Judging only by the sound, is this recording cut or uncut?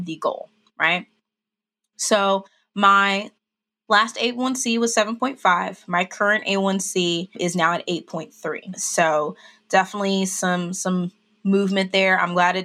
uncut